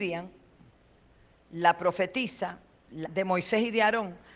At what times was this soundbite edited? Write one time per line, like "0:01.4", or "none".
0:03.0